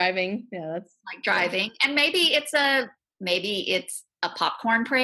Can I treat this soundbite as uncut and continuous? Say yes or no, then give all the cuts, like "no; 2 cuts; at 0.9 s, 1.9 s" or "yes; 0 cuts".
yes; 0 cuts